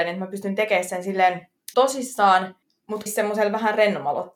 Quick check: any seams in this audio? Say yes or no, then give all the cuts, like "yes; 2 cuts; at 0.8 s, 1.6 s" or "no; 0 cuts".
yes; 2 cuts; at 1.7 s, 3.1 s